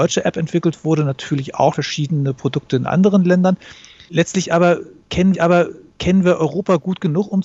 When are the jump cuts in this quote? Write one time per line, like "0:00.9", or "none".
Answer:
0:01.7
0:05.3